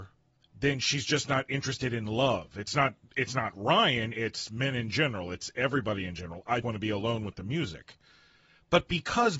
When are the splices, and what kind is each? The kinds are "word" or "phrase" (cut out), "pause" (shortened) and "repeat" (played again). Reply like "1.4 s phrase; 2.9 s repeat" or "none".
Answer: 6.6 s word